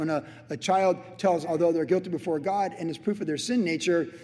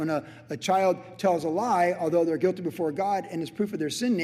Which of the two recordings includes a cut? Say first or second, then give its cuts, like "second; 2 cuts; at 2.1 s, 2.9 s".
first; 1 cut; at 1.4 s